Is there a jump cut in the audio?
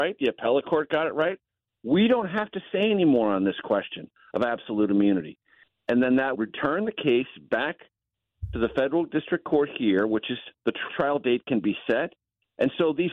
yes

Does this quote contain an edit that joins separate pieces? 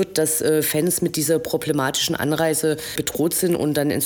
no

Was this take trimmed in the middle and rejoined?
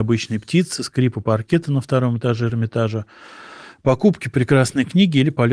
no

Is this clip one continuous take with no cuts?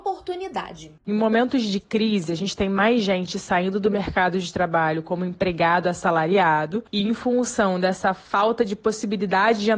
no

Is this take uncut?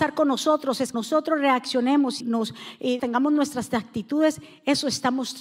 no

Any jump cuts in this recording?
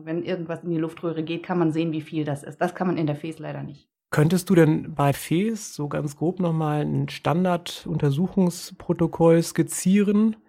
yes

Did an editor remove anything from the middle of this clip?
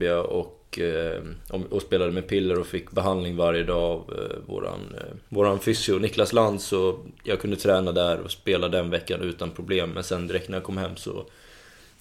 yes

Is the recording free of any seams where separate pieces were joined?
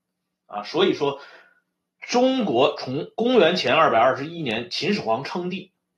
yes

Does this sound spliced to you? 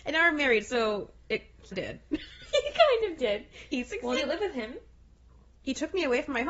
yes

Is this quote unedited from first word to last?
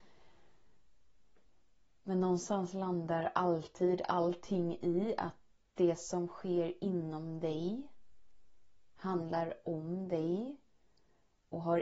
yes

